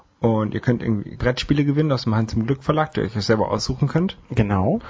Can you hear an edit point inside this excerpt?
yes; 1 cut; at 1.2 s

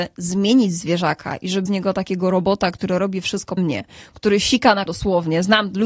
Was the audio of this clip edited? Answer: yes; 3 cuts; at 1.7 s, 3.6 s, 4.9 s

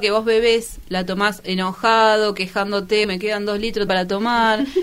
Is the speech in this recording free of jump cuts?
no; 2 cuts; at 3.0 s, 3.9 s

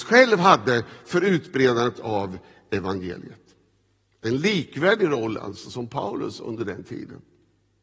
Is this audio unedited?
yes; 0 cuts

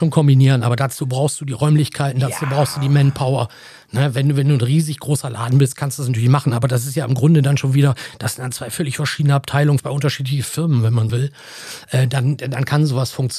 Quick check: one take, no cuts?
no; 2 cuts; at 9.8 s, 11.1 s

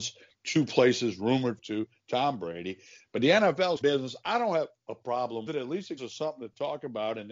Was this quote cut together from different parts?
yes; 4 cuts; at 1.6 s, 3.8 s, 5.5 s, 6.0 s

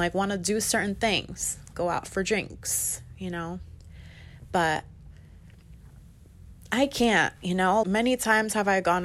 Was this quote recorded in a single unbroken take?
no; 2 cuts; at 1.7 s, 7.8 s

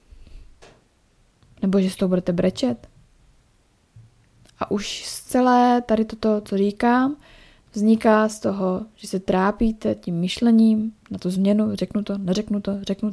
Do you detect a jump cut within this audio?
no; 0 cuts

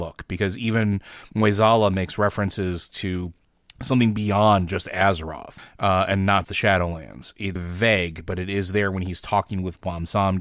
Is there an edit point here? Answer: yes; 2 cuts; at 6.4 s, 7.6 s

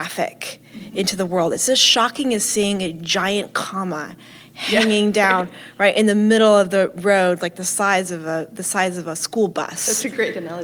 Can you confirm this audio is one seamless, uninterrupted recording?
yes; 0 cuts

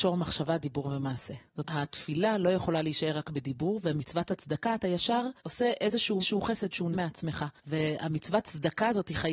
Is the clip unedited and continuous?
no; 5 cuts; at 1.6 s, 5.4 s, 6.2 s, 6.9 s, 7.6 s

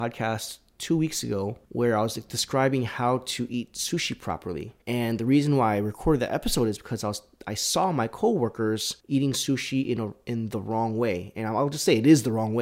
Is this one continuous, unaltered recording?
no; 3 cuts; at 1.6 s, 4.8 s, 9.0 s

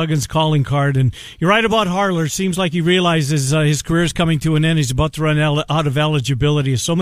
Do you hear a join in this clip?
no; 0 cuts

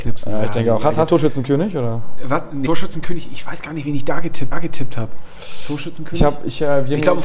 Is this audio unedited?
no; 3 cuts; at 1.1 s, 2.7 s, 4.5 s

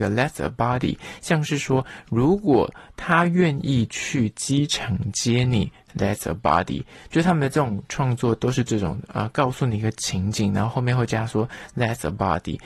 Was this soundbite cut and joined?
no; 0 cuts

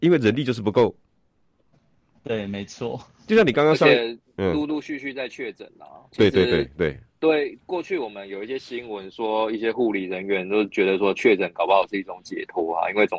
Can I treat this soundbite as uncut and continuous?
yes; 0 cuts

